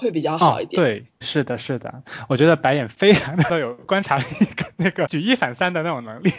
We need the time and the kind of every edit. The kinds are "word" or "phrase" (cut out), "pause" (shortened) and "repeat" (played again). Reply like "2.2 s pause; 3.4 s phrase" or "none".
1.2 s word